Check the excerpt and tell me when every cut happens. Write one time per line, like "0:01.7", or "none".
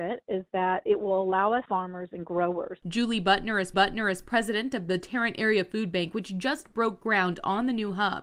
0:01.7
0:03.7